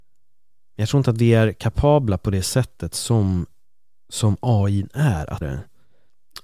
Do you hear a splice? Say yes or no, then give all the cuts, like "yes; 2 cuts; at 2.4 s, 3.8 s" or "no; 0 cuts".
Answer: yes; 1 cut; at 5.4 s